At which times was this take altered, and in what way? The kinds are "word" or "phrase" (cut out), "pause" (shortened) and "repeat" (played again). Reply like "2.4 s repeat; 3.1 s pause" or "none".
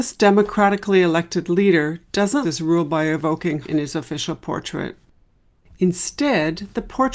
2.4 s word; 3.6 s word